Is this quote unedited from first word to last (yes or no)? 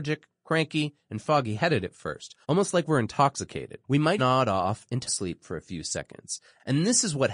no